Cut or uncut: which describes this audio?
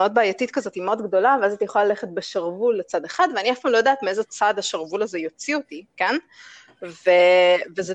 uncut